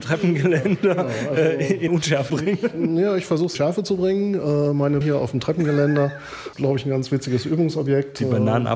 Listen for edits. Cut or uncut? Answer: cut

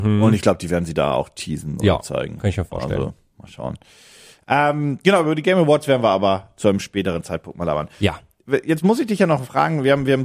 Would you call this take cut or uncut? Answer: uncut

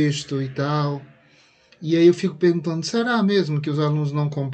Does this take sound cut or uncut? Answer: uncut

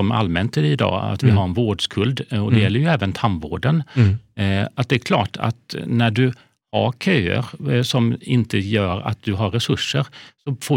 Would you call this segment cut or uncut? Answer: uncut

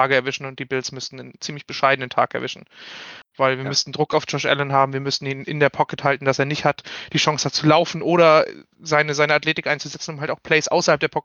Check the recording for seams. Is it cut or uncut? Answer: uncut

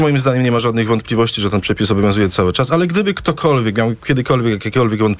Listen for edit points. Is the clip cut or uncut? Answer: uncut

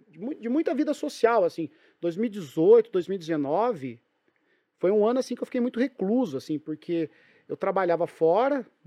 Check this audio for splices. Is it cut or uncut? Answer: uncut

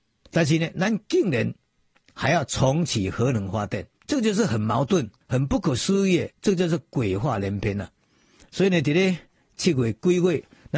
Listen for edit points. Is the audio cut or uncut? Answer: cut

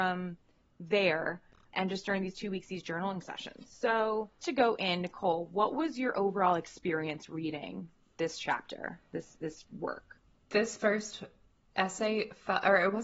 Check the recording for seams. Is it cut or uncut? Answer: cut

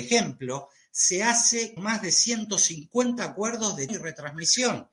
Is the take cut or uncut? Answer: cut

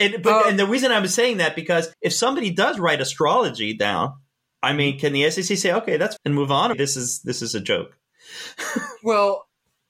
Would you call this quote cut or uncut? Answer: cut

